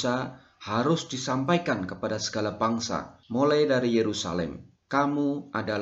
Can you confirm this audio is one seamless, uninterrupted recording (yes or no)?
no